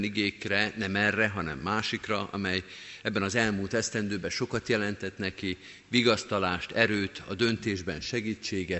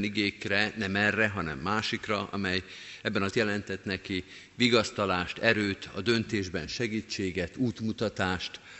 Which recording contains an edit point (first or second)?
second